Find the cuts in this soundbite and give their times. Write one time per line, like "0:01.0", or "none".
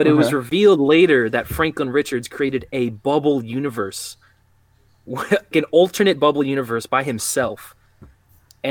0:05.5